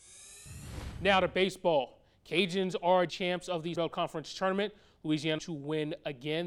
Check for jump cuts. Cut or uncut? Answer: cut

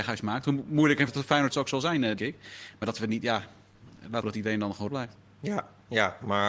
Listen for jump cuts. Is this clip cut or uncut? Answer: cut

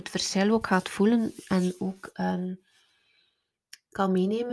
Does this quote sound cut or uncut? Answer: uncut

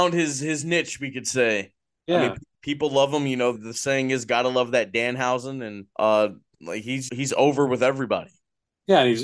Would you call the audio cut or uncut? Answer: cut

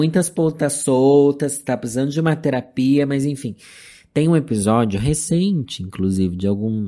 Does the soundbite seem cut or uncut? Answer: uncut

